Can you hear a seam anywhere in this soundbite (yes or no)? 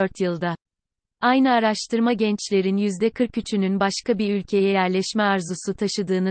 no